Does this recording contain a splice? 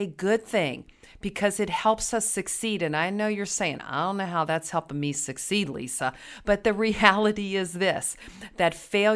no; 0 cuts

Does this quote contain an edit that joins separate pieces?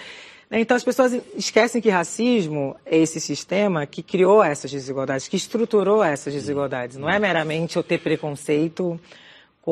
no; 0 cuts

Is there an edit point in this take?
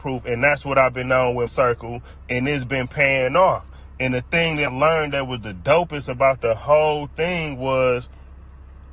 yes; 2 cuts; at 1.5 s, 4.7 s

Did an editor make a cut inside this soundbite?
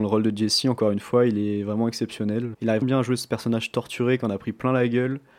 yes; 1 cut; at 2.8 s

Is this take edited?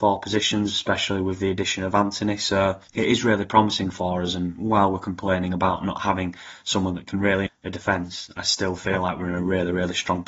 yes; 2 cuts; at 2.9 s, 7.5 s

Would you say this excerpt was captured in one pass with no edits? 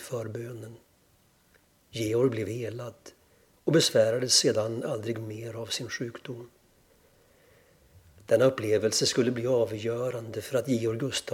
yes; 0 cuts

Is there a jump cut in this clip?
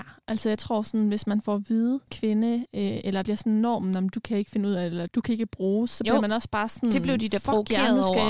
yes; 3 cuts; at 2.1 s, 3.2 s, 5.1 s

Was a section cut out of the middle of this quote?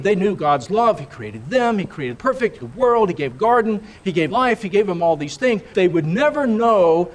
yes; 5 cuts; at 2.1 s, 2.6 s, 3.3 s, 4.3 s, 5.7 s

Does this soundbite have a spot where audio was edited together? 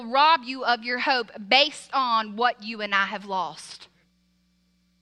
no; 0 cuts

